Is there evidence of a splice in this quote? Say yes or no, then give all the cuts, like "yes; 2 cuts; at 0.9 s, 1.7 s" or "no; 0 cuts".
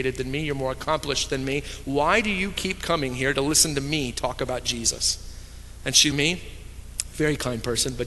yes; 1 cut; at 6.1 s